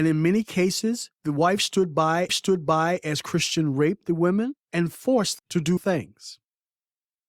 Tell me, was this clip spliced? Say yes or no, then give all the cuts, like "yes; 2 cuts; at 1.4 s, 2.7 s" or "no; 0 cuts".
yes; 5 cuts; at 1.1 s, 2.3 s, 4.6 s, 5.4 s, 5.8 s